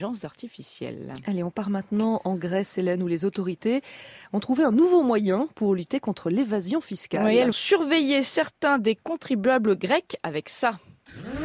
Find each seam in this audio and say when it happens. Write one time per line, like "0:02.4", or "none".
0:07.5